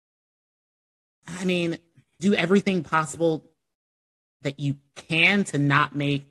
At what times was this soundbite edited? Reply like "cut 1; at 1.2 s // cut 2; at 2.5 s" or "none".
cut 1; at 1.2 s // cut 2; at 2.2 s